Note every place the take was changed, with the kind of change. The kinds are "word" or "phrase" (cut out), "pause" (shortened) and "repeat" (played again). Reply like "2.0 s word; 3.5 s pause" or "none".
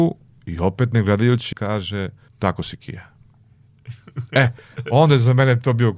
1.5 s word; 2.3 s word